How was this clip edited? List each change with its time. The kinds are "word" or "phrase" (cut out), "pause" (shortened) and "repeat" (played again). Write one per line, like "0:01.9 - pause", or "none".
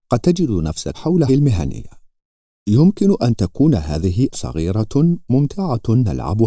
0:00.9 - word
0:01.3 - word
0:04.3 - word

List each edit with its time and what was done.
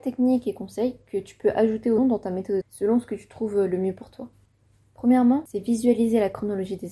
0:02.0 - word
0:02.6 - word

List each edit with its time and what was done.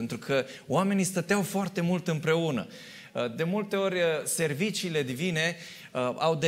none

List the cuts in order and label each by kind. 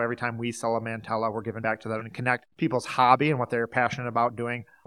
0:01.6 - word
0:02.0 - word
0:02.5 - pause

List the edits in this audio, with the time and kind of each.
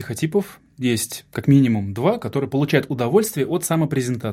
none

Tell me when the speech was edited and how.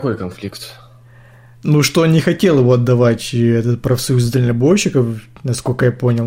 none

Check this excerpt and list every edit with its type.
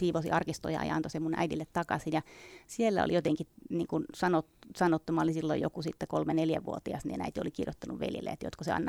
none

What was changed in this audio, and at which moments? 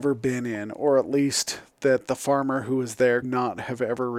0:03.2 - word

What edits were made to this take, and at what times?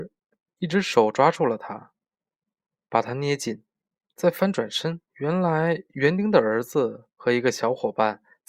0:05.1 - pause

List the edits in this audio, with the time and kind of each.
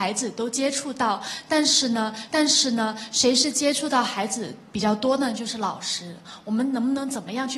0:02.3 - repeat

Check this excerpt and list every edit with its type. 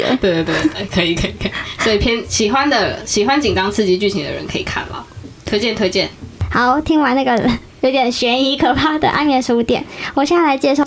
none

